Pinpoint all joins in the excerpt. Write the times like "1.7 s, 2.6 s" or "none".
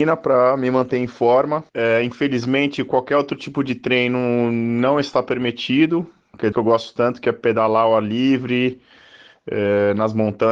1.7 s, 6.5 s